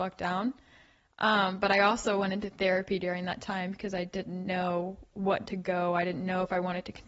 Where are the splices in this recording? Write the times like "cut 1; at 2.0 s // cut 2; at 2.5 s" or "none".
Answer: cut 1; at 5.5 s